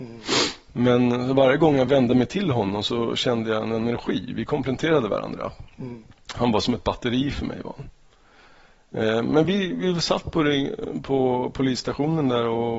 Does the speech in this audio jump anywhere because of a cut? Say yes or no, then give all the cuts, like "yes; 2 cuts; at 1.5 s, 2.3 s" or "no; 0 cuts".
no; 0 cuts